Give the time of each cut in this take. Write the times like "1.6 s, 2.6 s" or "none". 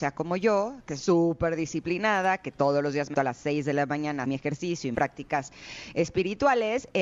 1.0 s, 3.1 s, 4.2 s, 4.9 s